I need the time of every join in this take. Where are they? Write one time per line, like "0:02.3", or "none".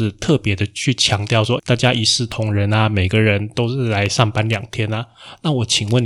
0:01.6